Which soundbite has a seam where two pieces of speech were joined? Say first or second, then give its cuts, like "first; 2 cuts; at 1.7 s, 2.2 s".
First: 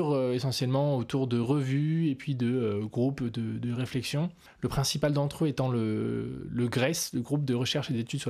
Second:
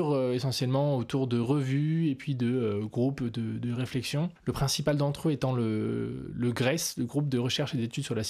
second; 1 cut; at 4.4 s